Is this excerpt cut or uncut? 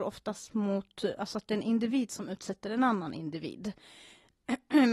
uncut